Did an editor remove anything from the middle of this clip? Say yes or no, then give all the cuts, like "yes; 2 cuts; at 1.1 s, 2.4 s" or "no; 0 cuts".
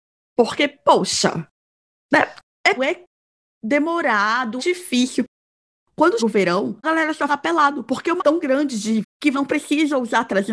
yes; 8 cuts; at 2.8 s, 4.6 s, 6.2 s, 6.8 s, 7.3 s, 8.2 s, 9.0 s, 9.3 s